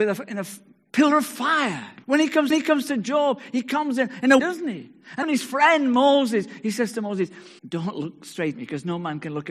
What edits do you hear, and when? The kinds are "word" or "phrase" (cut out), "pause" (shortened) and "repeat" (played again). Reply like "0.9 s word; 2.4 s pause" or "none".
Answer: 2.0 s pause; 2.5 s repeat; 4.4 s word; 5.2 s word; 7.6 s pause; 8.5 s word